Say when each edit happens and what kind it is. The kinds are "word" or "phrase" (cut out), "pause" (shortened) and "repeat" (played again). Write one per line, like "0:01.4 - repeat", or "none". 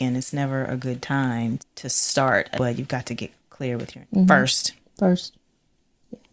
0:01.6 - word
0:02.6 - phrase
0:04.0 - word